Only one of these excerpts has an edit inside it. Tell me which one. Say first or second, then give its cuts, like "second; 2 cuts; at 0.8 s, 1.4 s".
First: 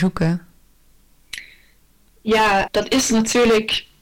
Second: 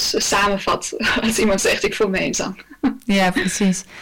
first; 1 cut; at 2.7 s